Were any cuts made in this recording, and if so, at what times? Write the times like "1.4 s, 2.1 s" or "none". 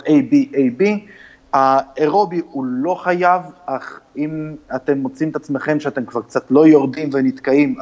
none